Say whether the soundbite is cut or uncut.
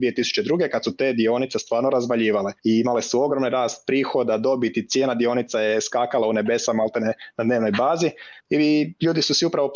cut